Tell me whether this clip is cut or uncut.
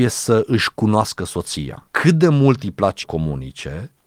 cut